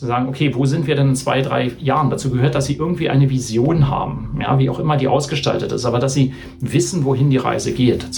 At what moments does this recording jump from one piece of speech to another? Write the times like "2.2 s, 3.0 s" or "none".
none

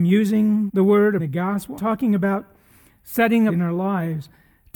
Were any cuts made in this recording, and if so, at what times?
1.2 s, 1.8 s, 3.5 s

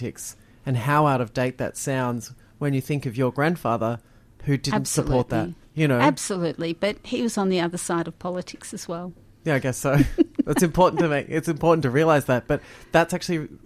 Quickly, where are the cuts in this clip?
none

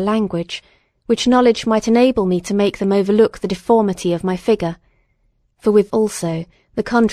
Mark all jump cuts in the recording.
5.9 s

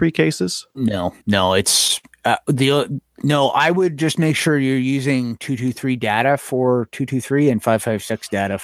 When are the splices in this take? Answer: 1.2 s

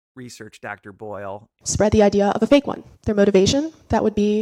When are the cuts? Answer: 2.9 s

